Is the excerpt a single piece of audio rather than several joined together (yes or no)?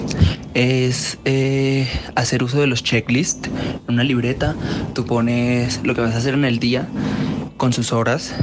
yes